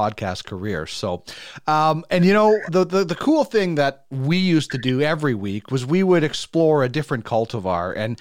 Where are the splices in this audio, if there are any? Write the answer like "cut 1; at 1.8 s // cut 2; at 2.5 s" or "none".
cut 1; at 2.7 s